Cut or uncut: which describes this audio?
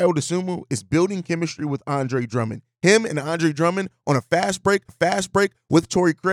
cut